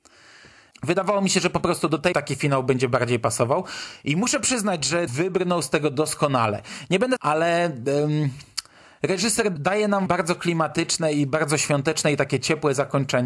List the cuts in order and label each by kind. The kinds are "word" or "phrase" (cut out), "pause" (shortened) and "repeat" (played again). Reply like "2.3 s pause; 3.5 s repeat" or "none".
2.1 s word; 5.1 s word; 7.2 s word; 9.6 s word; 10.1 s word